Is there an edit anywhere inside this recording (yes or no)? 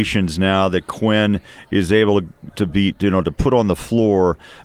no